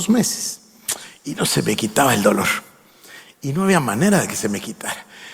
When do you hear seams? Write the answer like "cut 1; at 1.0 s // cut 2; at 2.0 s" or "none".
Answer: none